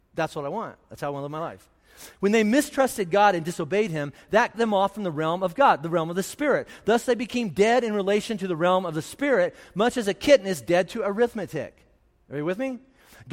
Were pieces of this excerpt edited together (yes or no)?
yes